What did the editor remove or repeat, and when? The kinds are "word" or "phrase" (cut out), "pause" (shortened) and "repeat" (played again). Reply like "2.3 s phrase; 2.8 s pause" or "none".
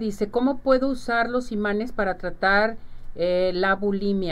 none